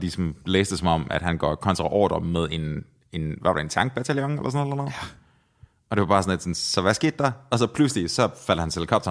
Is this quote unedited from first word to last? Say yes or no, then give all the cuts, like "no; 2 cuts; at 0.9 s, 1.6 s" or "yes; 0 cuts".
yes; 0 cuts